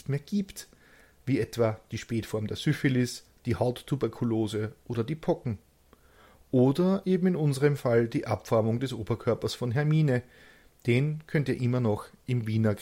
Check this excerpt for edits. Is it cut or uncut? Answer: uncut